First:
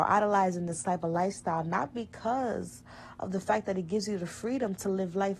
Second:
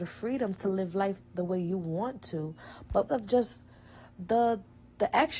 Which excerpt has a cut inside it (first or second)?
second